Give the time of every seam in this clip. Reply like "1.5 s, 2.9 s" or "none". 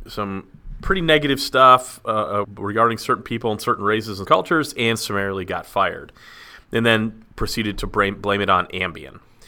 2.4 s, 4.2 s